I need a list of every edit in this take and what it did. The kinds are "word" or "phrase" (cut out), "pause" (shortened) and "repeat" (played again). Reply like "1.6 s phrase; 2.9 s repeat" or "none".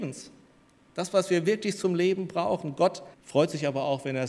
3.1 s pause